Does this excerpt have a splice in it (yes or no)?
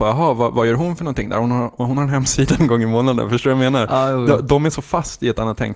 yes